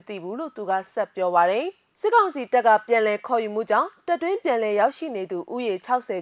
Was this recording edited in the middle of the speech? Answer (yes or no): no